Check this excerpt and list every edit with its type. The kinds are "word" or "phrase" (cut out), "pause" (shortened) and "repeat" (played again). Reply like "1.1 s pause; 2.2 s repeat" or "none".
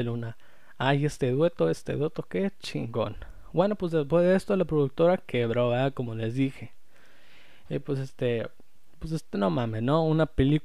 none